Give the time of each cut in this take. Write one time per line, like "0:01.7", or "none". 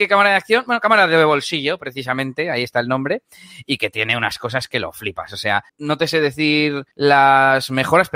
0:05.7
0:06.9